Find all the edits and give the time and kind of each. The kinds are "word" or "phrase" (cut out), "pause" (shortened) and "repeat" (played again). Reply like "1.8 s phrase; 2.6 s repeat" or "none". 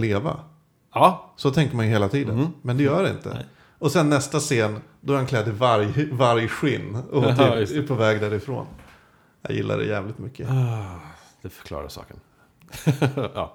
none

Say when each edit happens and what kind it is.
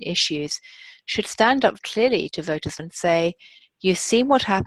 1.8 s word; 2.8 s word

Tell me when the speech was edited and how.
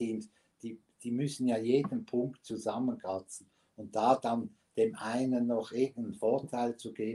none

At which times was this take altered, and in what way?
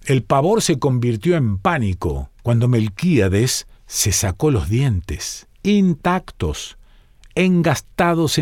2.4 s pause; 3.8 s pause; 5.5 s pause

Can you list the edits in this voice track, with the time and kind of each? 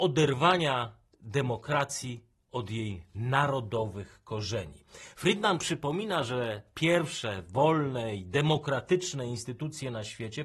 none

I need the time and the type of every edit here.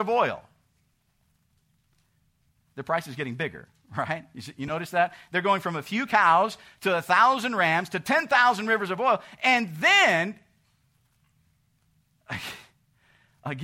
none

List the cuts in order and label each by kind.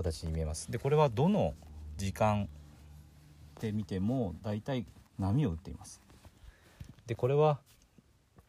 5.1 s pause

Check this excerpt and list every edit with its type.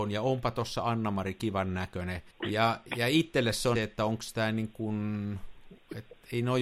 2.3 s pause; 3.7 s phrase

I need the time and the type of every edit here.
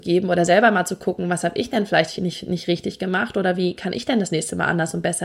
2.2 s word

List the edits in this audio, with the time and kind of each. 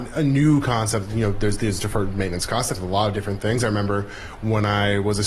2.7 s word

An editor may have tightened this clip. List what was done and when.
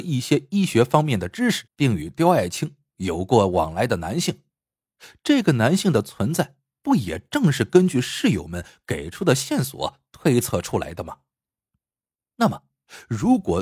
1.7 s pause

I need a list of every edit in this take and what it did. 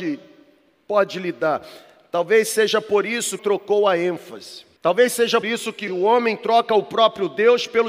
3.4 s phrase; 4.8 s pause; 5.4 s word; 5.9 s word

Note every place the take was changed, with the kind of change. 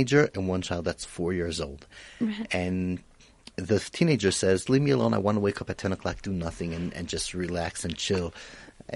4.7 s word

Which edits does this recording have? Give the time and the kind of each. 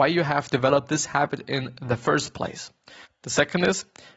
none

